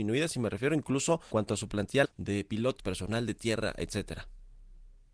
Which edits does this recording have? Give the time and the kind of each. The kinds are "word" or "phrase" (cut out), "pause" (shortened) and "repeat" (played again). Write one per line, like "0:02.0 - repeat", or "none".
0:01.3 - word
0:02.0 - word
0:02.8 - word